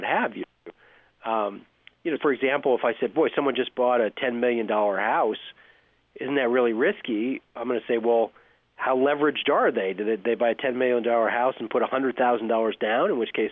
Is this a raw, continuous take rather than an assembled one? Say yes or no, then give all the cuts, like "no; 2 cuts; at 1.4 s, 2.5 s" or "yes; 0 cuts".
no; 1 cut; at 2.2 s